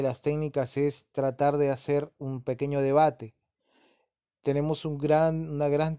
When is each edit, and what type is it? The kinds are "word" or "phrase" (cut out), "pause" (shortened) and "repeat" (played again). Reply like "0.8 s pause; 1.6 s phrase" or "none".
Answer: none